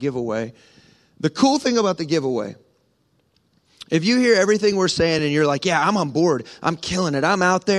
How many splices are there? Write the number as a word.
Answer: zero